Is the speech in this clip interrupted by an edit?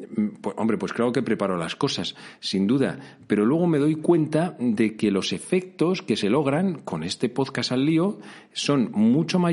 no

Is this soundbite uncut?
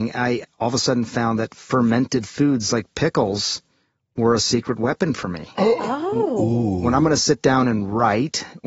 yes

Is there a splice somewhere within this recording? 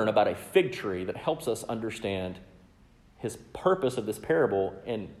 no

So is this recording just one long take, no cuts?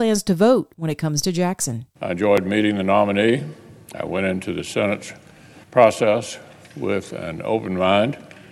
no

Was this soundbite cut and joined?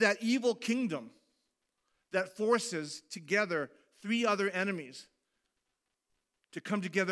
no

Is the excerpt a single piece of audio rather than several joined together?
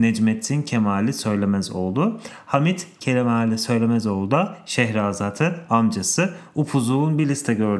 yes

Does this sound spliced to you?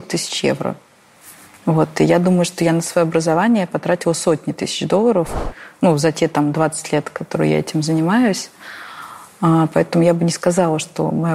no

